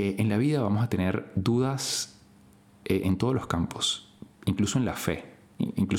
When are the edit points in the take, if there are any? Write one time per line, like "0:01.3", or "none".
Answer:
none